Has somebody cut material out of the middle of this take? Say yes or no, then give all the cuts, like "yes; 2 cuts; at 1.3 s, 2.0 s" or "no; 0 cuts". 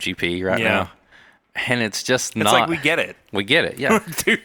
no; 0 cuts